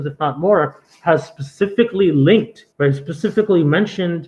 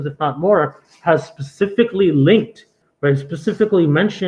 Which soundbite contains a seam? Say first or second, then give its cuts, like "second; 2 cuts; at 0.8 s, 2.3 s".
first; 1 cut; at 2.7 s